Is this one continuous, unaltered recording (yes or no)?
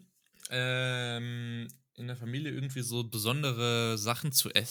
yes